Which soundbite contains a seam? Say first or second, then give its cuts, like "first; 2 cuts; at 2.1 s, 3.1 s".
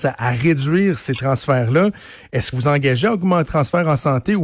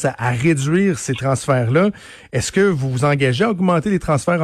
first; 2 cuts; at 2.5 s, 3.5 s